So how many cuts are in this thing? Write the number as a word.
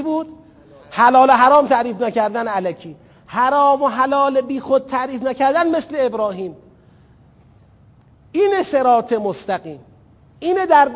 zero